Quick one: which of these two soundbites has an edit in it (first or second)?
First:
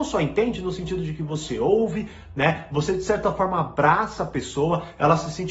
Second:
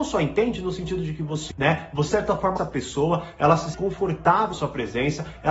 second